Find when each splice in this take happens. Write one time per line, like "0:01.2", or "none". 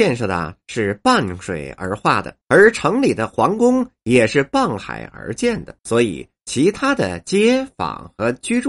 0:02.4
0:05.8